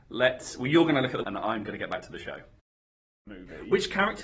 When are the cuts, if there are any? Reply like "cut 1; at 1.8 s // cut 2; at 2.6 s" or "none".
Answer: cut 1; at 1.2 s